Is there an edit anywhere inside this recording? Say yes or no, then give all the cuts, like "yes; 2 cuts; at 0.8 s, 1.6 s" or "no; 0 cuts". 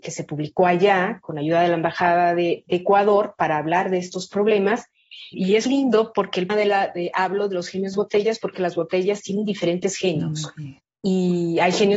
yes; 7 cuts; at 2.6 s, 5.3 s, 5.7 s, 6.5 s, 7.9 s, 8.5 s, 10.8 s